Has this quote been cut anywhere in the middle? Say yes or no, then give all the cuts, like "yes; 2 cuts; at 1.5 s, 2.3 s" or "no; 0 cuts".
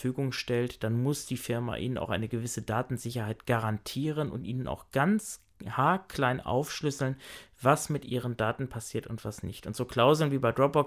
no; 0 cuts